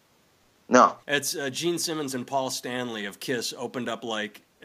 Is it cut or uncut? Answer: cut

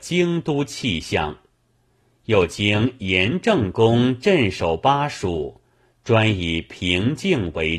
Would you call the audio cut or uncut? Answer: uncut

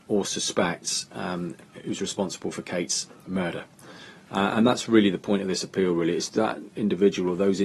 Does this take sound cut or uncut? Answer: cut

